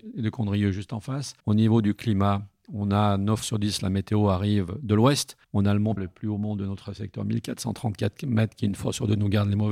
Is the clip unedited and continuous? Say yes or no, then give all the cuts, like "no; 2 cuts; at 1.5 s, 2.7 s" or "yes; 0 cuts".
no; 4 cuts; at 1.4 s, 3.4 s, 5.4 s, 6.0 s